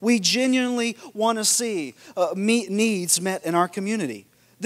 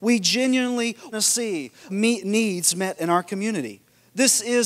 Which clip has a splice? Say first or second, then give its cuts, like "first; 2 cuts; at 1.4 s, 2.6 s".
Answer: second; 2 cuts; at 1.1 s, 1.9 s